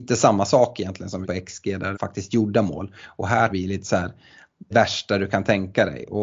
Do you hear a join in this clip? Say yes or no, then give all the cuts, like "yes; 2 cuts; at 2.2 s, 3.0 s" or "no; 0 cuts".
yes; 4 cuts; at 1.2 s, 1.9 s, 3.5 s, 4.7 s